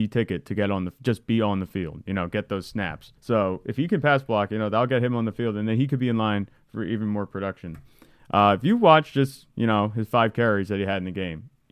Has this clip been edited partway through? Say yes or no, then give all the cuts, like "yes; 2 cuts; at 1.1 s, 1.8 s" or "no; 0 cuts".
yes; 1 cut; at 3.2 s